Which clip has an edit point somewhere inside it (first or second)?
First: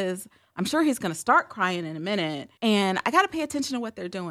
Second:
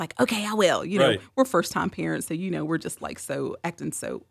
first